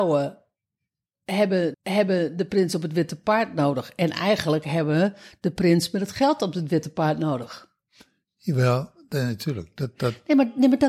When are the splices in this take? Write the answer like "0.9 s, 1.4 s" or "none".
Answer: 1.7 s